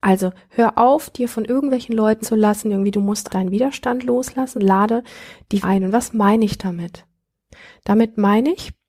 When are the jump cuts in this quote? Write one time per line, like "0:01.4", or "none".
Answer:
0:02.2
0:03.3
0:04.6
0:05.6

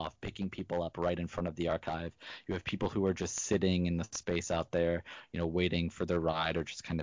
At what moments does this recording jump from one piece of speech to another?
none

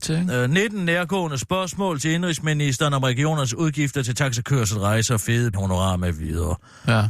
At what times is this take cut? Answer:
0:05.5

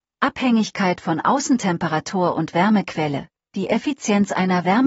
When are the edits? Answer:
none

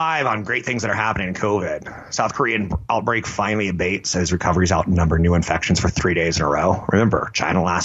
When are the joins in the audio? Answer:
none

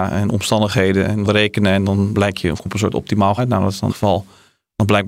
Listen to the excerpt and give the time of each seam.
0:01.3
0:02.1
0:02.7
0:03.4
0:03.9

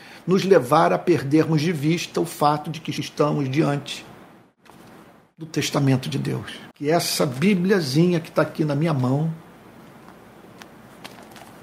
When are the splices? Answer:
0:06.7

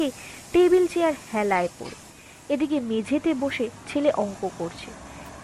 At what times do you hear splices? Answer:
none

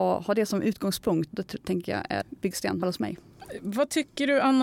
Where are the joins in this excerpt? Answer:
0:01.3
0:02.2
0:02.8

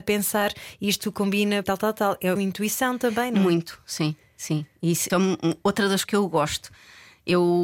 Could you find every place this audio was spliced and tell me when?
0:01.6
0:02.4
0:05.1
0:06.0

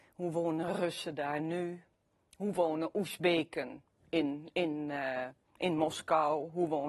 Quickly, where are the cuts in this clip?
none

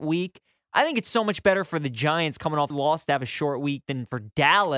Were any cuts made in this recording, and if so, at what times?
0:02.7

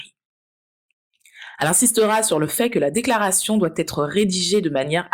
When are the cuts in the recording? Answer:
none

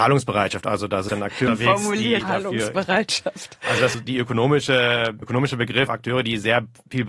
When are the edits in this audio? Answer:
0:01.1
0:01.5
0:02.2
0:03.9
0:05.2
0:05.9

